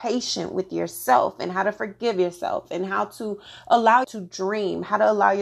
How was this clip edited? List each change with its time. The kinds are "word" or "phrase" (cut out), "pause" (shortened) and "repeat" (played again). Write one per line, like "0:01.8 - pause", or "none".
0:04.0 - word

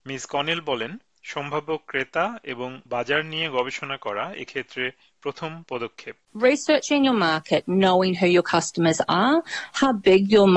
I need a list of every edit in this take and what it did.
0:02.9 - pause

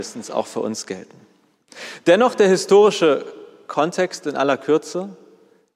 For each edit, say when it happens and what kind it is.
none

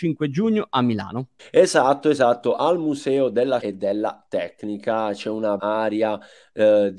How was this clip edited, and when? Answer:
0:01.4 - pause
0:03.6 - word
0:05.6 - word

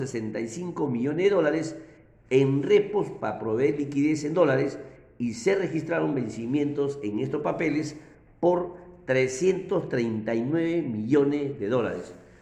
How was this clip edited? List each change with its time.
none

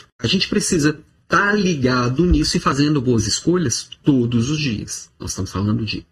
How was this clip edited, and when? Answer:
none

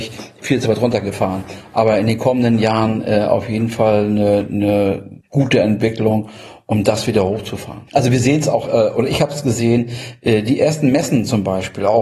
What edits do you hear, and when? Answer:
0:05.2 - pause
0:07.9 - pause

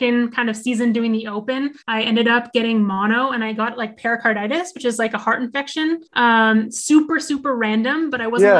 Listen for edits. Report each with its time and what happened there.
0:01.8 - pause
0:06.1 - pause

